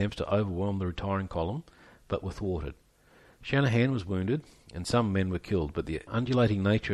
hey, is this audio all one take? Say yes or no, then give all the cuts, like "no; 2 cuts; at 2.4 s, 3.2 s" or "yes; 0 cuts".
yes; 0 cuts